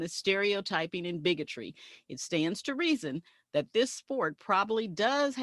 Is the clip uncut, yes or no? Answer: yes